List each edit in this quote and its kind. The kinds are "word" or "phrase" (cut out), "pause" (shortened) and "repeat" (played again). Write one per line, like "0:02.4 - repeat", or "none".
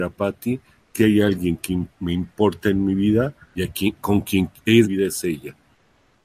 0:01.0 - word
0:01.9 - pause
0:03.4 - pause
0:04.8 - phrase